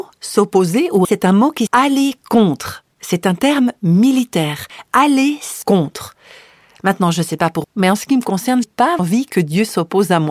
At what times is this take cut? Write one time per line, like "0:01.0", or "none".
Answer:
0:01.0
0:01.7
0:02.9
0:05.6
0:07.6
0:08.6
0:09.0